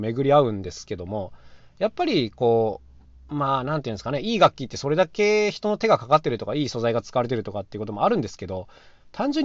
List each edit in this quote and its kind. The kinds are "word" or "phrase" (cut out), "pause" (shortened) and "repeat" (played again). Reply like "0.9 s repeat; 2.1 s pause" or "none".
3.1 s pause